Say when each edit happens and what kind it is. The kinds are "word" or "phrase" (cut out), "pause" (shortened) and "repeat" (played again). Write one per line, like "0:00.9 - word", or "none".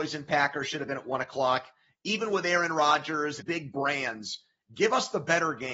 0:03.4 - phrase